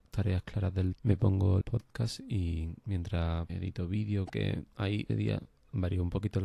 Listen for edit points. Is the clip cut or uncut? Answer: cut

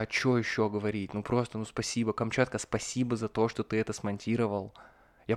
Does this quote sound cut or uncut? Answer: uncut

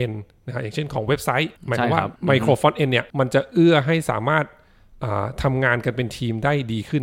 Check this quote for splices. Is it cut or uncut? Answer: cut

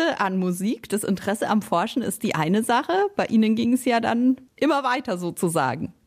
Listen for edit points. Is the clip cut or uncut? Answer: uncut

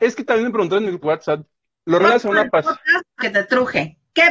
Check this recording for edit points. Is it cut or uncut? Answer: cut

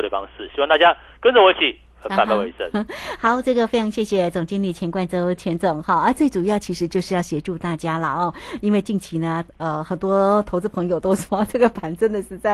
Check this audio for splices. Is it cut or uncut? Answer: uncut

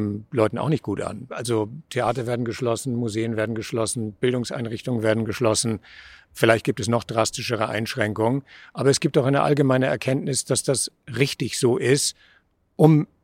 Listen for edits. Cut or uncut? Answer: uncut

